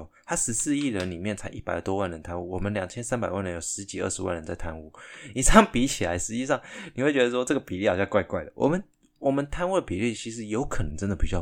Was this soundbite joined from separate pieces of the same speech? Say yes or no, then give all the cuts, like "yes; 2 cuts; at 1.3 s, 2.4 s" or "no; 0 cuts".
no; 0 cuts